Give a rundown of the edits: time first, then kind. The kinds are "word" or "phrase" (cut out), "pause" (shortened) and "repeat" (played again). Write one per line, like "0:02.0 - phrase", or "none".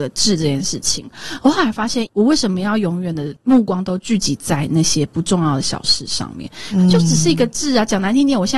none